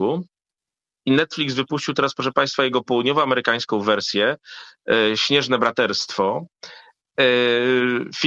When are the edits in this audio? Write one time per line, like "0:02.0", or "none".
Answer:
none